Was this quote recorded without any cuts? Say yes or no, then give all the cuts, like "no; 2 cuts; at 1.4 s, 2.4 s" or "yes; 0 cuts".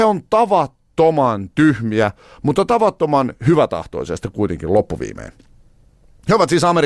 yes; 0 cuts